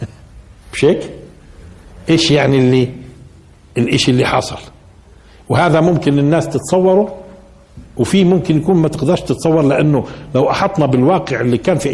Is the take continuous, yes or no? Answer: yes